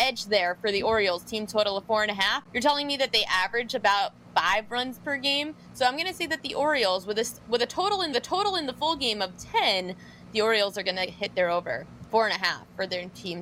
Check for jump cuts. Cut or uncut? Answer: cut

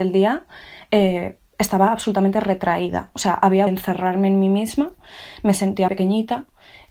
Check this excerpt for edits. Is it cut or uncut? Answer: cut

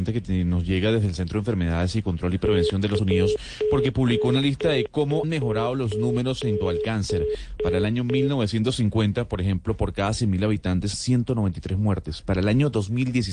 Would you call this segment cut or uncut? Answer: cut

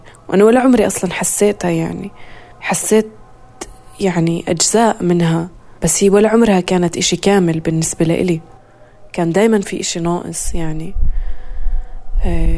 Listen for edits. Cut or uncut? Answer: cut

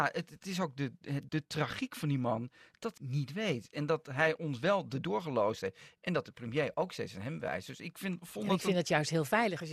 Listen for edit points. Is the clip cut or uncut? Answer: cut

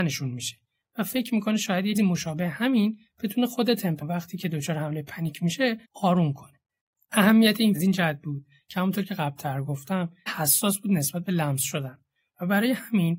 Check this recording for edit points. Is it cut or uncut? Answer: cut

